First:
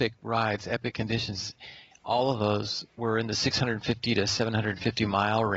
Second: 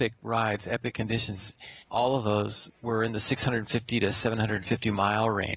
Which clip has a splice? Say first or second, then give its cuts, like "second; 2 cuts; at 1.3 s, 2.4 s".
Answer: second; 1 cut; at 1.8 s